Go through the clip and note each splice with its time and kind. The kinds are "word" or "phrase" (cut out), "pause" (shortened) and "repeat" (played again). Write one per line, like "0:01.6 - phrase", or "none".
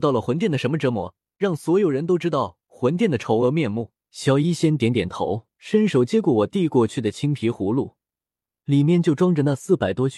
0:01.3 - pause
0:04.0 - pause
0:05.6 - pause